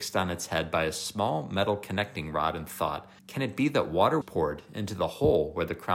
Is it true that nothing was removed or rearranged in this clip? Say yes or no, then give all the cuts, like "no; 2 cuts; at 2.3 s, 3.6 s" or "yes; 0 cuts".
no; 2 cuts; at 3.2 s, 4.2 s